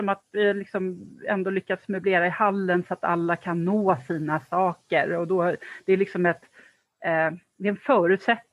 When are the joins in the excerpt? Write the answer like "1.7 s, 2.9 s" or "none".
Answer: none